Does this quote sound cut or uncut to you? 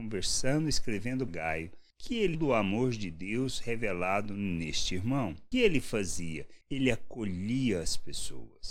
cut